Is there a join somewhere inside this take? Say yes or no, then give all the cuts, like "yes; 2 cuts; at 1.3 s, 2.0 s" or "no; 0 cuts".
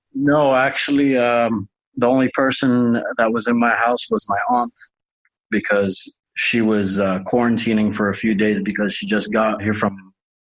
no; 0 cuts